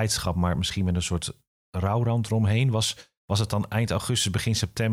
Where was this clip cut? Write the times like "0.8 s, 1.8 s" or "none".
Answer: none